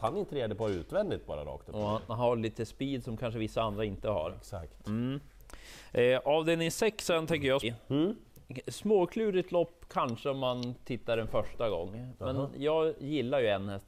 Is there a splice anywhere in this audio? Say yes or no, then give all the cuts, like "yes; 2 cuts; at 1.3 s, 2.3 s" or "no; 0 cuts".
yes; 1 cut; at 7.6 s